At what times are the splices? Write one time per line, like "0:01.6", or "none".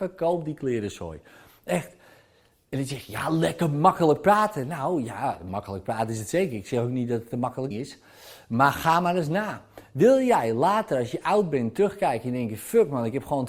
0:07.7